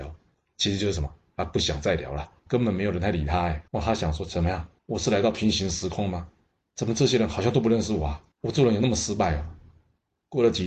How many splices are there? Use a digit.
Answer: 4